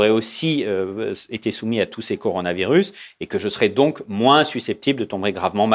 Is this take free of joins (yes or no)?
yes